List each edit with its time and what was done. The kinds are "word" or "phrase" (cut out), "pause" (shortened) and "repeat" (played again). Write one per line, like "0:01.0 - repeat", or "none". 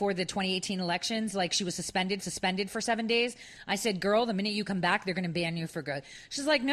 0:02.2 - repeat